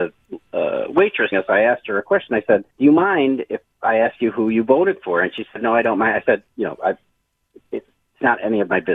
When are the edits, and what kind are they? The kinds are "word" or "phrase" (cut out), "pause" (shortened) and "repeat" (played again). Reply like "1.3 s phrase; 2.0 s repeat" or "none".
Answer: 1.3 s phrase; 2.7 s pause